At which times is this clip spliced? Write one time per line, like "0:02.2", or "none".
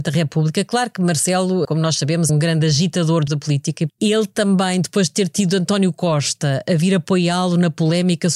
0:01.6
0:02.3
0:03.3
0:03.9